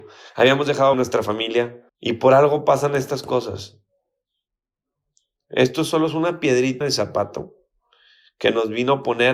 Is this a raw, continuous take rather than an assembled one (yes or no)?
no